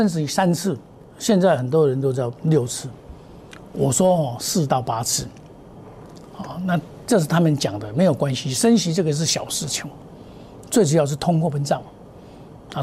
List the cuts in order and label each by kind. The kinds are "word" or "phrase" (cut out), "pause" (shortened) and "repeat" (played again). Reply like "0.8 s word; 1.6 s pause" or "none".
2.4 s pause